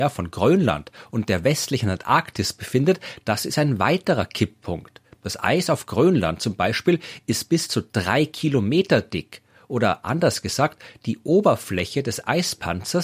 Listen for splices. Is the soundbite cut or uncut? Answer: uncut